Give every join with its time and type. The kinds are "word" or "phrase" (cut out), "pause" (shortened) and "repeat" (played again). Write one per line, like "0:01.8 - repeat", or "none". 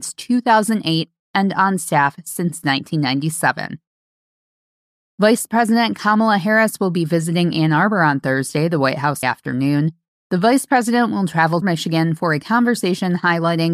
0:09.2 - phrase
0:11.6 - phrase